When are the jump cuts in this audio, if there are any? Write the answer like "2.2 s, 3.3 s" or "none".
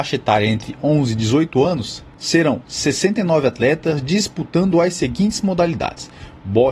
none

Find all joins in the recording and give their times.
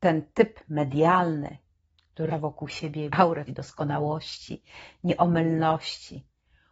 2.3 s, 3.1 s, 3.5 s

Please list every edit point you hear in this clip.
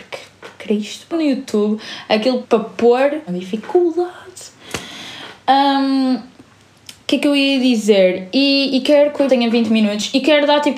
1.1 s, 2.4 s, 3.3 s, 9.3 s

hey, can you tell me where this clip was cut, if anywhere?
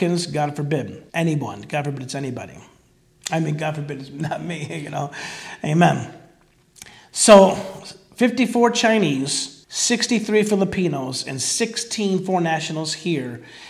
1.1 s, 9.6 s

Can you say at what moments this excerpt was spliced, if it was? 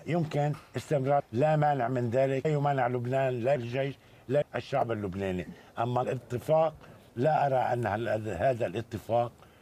1.2 s, 2.4 s, 3.6 s, 4.4 s, 6.0 s, 7.1 s

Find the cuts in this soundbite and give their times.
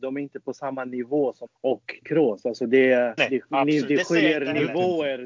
1.5 s, 2.0 s, 3.2 s

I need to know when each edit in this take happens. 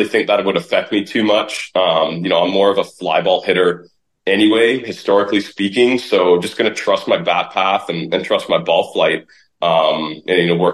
none

